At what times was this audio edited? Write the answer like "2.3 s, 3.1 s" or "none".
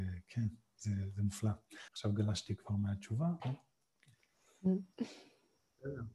1.9 s, 3.4 s, 4.9 s